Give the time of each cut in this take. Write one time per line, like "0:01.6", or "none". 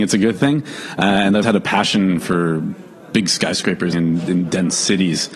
0:01.4
0:02.2
0:03.9